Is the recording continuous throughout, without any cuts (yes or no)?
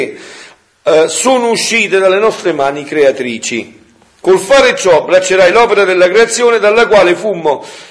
yes